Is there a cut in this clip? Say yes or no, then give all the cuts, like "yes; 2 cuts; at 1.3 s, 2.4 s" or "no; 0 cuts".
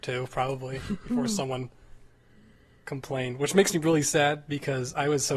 no; 0 cuts